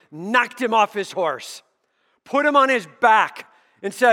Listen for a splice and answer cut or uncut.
uncut